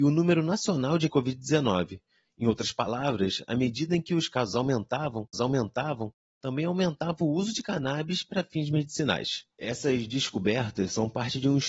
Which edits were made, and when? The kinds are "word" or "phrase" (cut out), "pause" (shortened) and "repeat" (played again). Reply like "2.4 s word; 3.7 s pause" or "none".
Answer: 1.1 s phrase; 5.3 s repeat; 9.5 s pause